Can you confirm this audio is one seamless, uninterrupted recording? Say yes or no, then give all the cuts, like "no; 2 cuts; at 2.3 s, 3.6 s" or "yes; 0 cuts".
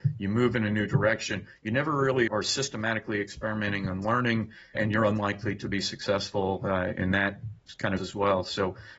no; 4 cuts; at 2.3 s, 4.7 s, 6.9 s, 8.0 s